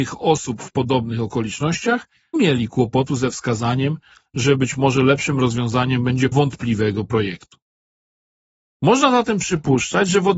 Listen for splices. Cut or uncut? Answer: cut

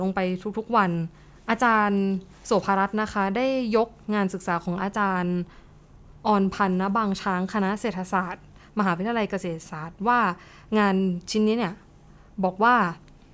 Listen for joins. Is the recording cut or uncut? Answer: uncut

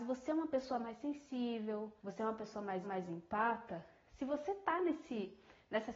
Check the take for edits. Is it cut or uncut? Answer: cut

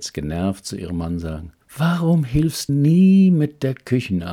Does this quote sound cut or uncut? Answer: cut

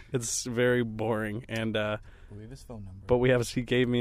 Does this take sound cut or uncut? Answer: uncut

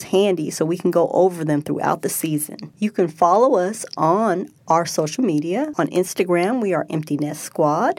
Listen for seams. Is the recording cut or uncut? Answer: uncut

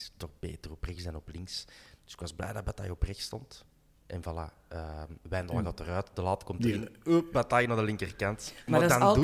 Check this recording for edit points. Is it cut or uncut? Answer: uncut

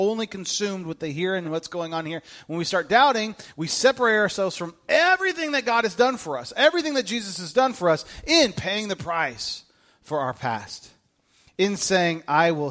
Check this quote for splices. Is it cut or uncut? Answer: cut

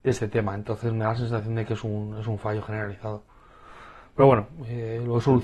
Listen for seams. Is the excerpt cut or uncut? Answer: uncut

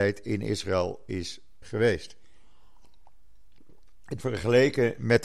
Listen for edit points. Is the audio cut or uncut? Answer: cut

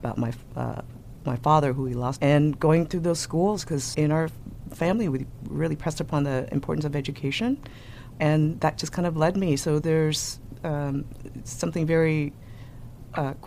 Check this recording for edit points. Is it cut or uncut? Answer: cut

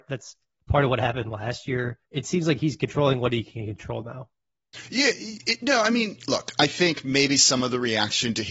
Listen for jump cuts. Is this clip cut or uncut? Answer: cut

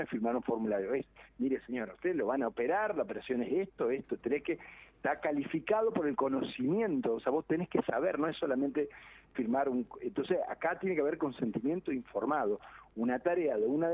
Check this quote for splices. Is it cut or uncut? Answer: uncut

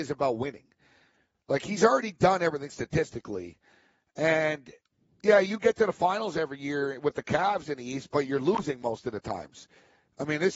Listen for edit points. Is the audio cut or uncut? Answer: uncut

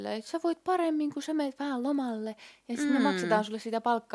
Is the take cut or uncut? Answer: uncut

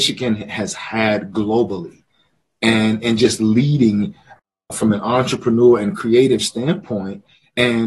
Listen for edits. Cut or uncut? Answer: uncut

